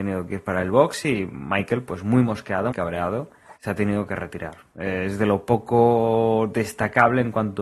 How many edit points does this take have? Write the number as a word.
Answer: two